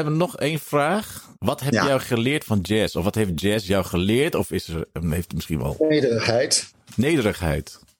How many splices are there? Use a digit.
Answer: 1